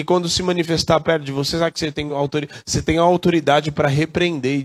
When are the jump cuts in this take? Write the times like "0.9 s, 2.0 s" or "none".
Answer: none